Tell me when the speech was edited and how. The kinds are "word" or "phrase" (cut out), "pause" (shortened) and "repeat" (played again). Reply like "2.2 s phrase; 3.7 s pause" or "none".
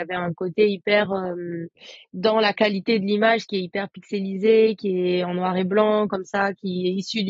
none